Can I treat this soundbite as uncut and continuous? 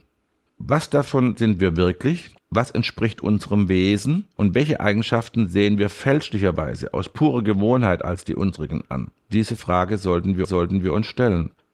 no; 2 cuts; at 2.4 s, 10.4 s

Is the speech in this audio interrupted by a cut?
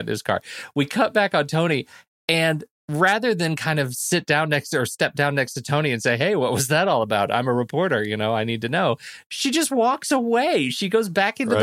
no; 0 cuts

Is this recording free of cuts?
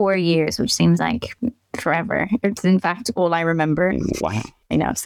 yes; 0 cuts

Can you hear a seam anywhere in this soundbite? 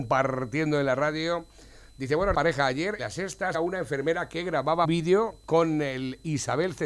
yes; 4 cuts; at 2.3 s, 3.0 s, 3.5 s, 4.8 s

